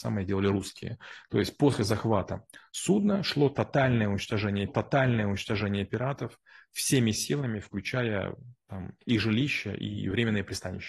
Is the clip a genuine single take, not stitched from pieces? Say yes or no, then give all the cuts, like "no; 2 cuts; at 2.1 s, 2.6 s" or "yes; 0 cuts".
no; 2 cuts; at 4.7 s, 9.0 s